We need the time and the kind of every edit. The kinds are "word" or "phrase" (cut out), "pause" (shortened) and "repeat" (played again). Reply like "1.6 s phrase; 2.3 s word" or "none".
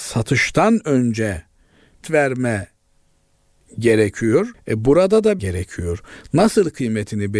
2.0 s phrase; 4.5 s pause; 5.4 s phrase